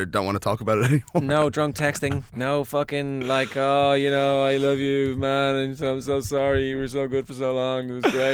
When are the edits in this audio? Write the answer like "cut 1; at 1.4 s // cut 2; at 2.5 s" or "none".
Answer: cut 1; at 2.3 s